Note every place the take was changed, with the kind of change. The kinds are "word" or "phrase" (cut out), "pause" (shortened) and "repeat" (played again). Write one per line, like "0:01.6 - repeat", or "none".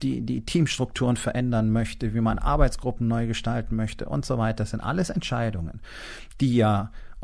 none